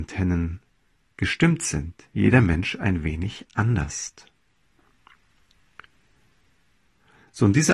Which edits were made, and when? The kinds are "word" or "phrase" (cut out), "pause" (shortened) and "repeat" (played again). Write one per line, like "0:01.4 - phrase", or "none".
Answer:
none